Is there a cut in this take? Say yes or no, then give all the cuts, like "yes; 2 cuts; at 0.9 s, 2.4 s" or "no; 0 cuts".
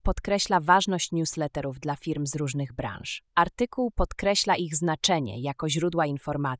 yes; 1 cut; at 3.3 s